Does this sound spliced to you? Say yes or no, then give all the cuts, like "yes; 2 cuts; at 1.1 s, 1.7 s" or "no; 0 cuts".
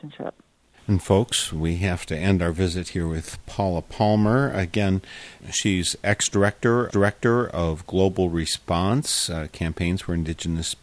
yes; 1 cut; at 6.9 s